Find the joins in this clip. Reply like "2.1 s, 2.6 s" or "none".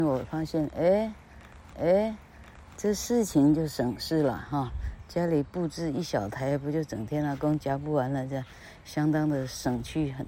1.7 s